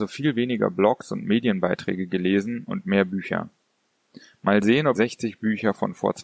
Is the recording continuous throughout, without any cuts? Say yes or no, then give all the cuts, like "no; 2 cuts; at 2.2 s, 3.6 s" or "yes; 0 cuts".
no; 1 cut; at 4.9 s